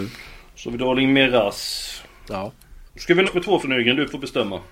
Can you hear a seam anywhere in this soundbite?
yes; 3 cuts; at 2.9 s, 3.2 s, 3.6 s

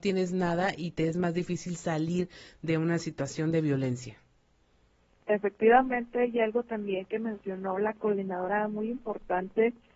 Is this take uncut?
yes; 0 cuts

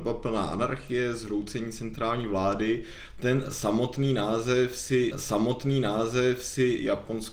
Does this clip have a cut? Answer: yes; 1 cut; at 5.1 s

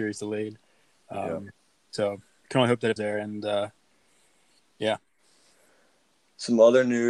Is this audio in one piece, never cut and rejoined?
no; 1 cut; at 3.0 s

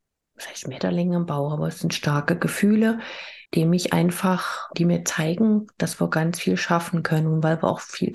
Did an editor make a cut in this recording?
yes; 2 cuts; at 3.4 s, 4.7 s

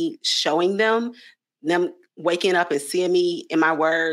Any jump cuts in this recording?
no; 0 cuts

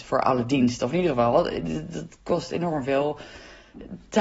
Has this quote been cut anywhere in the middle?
no; 0 cuts

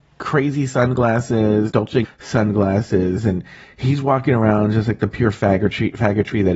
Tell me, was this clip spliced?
yes; 2 cuts; at 1.7 s, 2.0 s

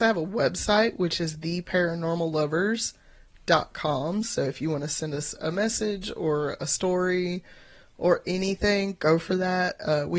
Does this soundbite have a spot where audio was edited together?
no; 0 cuts

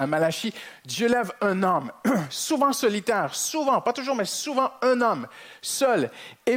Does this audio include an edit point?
no; 0 cuts

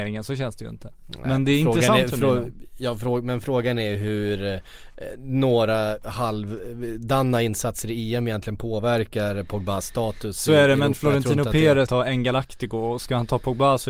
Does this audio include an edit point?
yes; 1 cut; at 11.9 s

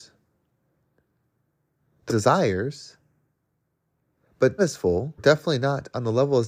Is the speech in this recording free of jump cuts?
no; 3 cuts; at 2.1 s, 4.6 s, 5.2 s

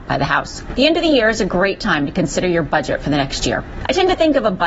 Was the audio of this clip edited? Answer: no; 0 cuts

